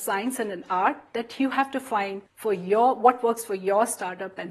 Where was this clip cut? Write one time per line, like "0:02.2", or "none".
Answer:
0:02.3